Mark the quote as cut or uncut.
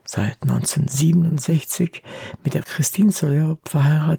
cut